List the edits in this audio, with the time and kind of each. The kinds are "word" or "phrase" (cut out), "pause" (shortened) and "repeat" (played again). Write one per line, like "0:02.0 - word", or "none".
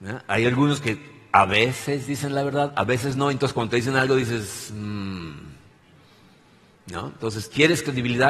none